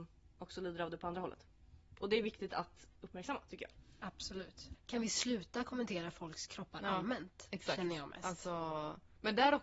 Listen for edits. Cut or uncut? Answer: uncut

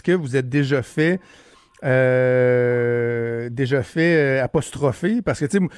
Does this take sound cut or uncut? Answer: uncut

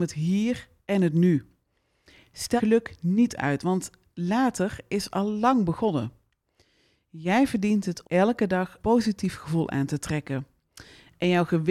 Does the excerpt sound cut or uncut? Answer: cut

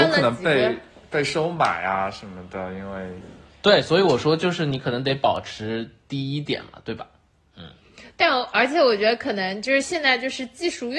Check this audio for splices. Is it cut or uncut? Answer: uncut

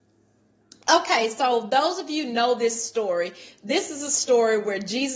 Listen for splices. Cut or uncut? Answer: uncut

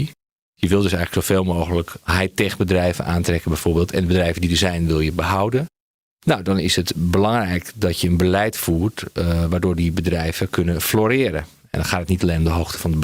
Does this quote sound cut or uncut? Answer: uncut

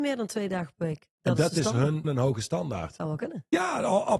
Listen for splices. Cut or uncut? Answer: cut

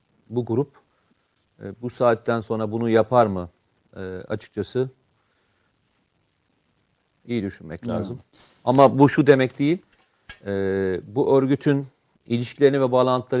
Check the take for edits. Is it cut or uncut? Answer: uncut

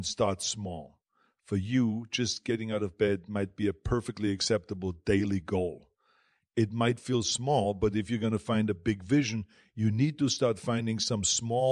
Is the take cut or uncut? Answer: uncut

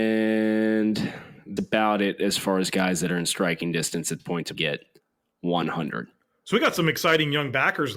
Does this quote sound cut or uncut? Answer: cut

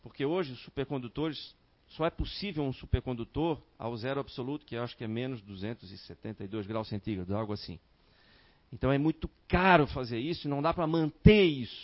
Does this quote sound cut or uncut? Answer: uncut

